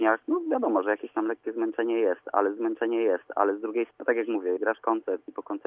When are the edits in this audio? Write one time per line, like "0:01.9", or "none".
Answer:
0:02.6
0:03.9
0:04.6